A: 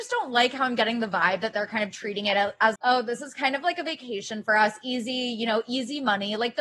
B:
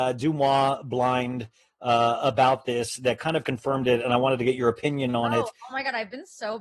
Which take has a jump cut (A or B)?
A